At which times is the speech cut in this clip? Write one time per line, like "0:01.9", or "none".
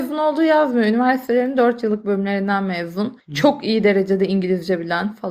none